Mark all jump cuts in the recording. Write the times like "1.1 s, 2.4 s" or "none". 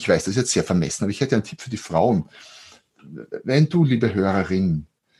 none